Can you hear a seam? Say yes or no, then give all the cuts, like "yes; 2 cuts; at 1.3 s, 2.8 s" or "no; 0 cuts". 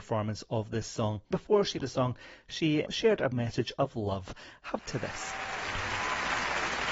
yes; 5 cuts; at 1.3 s, 1.8 s, 2.9 s, 3.3 s, 4.8 s